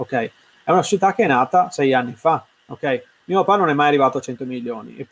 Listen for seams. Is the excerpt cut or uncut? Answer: uncut